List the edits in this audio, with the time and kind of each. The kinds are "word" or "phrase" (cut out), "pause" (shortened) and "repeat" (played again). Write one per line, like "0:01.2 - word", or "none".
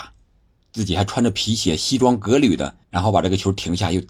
0:02.8 - pause

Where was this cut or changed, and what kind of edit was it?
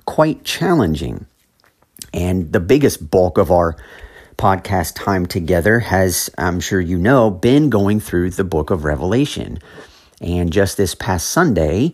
none

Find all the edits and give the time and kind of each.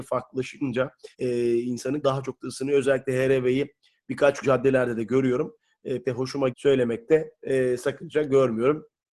0:01.1 - pause
0:02.0 - word
0:04.4 - word
0:06.0 - word
0:06.5 - word

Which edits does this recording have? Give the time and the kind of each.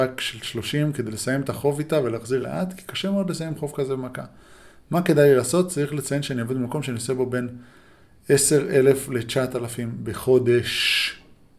0:02.4 - word

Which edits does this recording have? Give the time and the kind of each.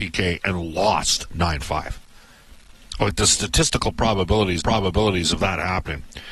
0:04.6 - repeat

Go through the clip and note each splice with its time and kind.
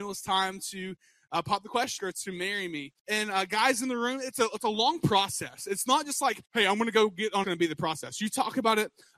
0:02.0 - phrase
0:03.0 - pause
0:06.5 - pause
0:07.4 - phrase

